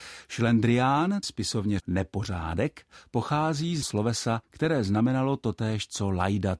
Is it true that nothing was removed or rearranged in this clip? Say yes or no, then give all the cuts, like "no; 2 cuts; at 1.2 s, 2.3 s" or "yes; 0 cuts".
no; 4 cuts; at 1.2 s, 1.8 s, 3.8 s, 4.4 s